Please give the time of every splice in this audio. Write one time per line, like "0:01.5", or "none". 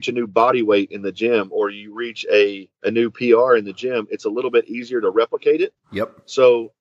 0:02.7